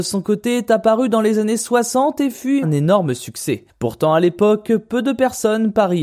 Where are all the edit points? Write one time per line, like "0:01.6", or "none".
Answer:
0:02.6